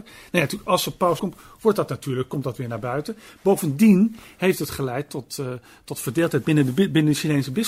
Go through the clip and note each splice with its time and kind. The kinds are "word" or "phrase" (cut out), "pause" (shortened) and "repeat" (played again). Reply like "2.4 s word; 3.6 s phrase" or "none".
1.2 s phrase